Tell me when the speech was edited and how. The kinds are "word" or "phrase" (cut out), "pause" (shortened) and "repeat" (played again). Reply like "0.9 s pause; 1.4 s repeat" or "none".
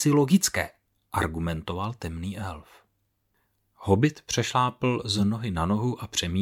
none